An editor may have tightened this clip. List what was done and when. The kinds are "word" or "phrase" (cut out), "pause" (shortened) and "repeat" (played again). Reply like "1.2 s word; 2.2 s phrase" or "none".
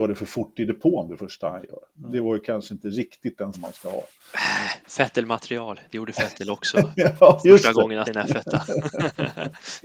3.5 s word; 4.8 s pause; 8.0 s word